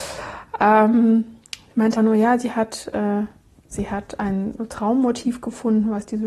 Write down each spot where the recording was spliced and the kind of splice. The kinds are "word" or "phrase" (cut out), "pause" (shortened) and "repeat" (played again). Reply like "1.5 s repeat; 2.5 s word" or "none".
2.0 s word; 3.7 s word